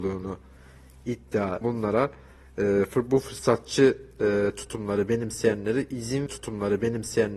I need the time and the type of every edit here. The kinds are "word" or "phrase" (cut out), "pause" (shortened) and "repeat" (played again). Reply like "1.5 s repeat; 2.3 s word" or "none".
1.6 s phrase; 6.3 s repeat